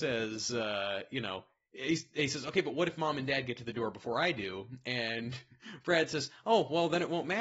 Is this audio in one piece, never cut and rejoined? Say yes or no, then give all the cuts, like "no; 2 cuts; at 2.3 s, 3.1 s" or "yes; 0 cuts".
yes; 0 cuts